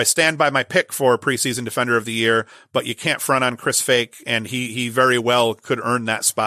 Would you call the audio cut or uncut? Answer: uncut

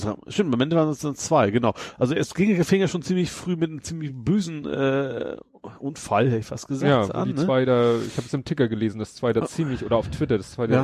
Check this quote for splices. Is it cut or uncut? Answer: uncut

